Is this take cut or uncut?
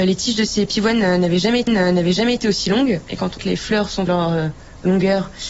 cut